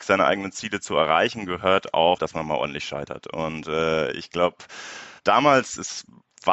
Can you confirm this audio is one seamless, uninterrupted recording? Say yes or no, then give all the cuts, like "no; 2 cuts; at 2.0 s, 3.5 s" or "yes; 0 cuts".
no; 1 cut; at 5.2 s